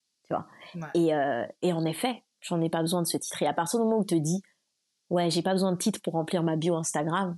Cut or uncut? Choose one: uncut